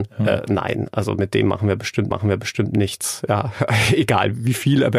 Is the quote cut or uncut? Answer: cut